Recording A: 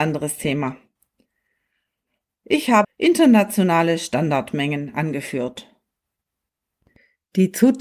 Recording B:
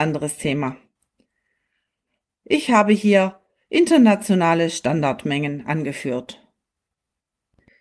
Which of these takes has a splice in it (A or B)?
A